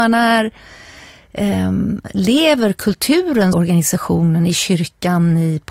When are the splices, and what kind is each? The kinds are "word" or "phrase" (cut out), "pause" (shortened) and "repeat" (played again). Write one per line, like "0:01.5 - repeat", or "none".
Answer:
0:03.5 - phrase